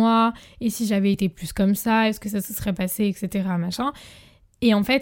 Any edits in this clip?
no; 0 cuts

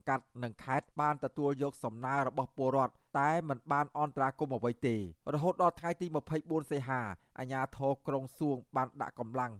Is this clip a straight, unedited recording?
no; 2 cuts; at 0.9 s, 5.2 s

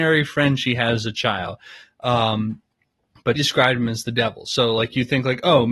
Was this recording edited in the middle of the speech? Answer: yes; 1 cut; at 3.4 s

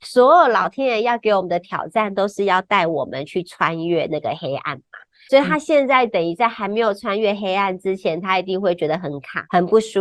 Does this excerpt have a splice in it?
no; 0 cuts

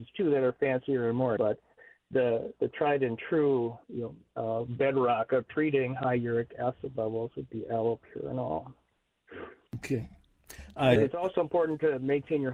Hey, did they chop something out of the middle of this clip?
yes; 3 cuts; at 1.4 s, 3.8 s, 11.0 s

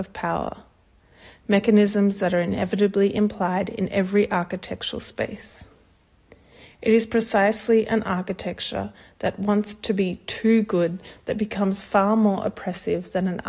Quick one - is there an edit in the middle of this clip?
no; 0 cuts

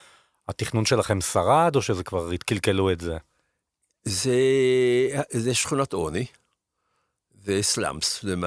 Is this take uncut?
yes; 0 cuts

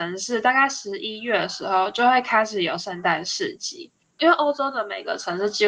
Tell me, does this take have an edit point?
no; 0 cuts

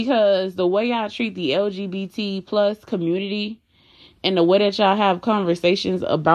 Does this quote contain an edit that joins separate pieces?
no; 0 cuts

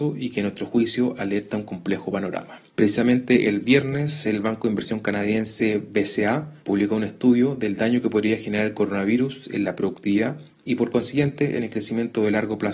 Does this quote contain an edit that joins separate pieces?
no; 0 cuts

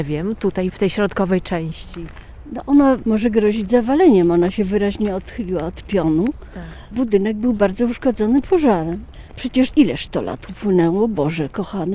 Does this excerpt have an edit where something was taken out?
yes; 1 cut; at 9.7 s

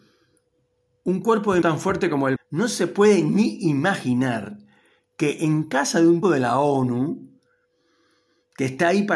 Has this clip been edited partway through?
yes; 3 cuts; at 1.6 s, 2.4 s, 6.2 s

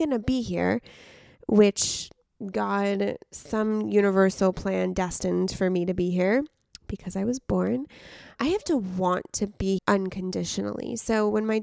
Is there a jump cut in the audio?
yes; 2 cuts; at 8.4 s, 9.8 s

